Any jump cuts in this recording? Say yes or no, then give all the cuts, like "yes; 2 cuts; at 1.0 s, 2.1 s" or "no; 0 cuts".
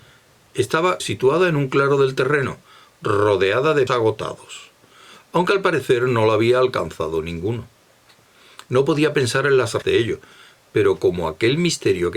yes; 3 cuts; at 1.0 s, 3.9 s, 9.8 s